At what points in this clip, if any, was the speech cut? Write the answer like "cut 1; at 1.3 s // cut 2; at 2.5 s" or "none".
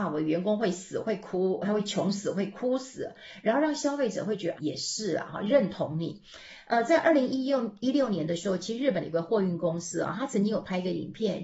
cut 1; at 4.6 s